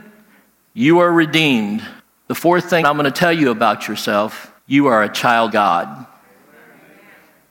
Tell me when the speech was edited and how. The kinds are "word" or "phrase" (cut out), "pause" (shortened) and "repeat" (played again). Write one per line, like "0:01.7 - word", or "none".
0:02.0 - pause
0:02.8 - word
0:04.6 - pause
0:05.5 - word